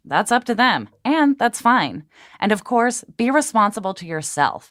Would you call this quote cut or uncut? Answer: uncut